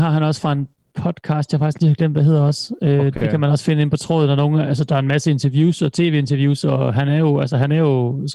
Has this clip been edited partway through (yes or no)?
no